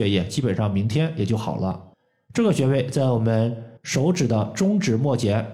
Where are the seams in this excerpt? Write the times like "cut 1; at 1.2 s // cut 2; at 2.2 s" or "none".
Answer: cut 1; at 1.9 s // cut 2; at 3.8 s